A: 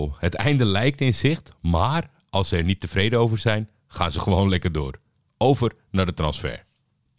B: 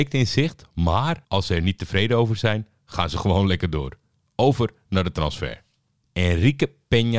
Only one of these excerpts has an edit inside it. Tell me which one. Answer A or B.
B